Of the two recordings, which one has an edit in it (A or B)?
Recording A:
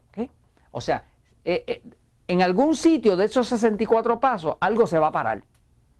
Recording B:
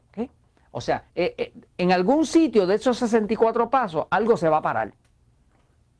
B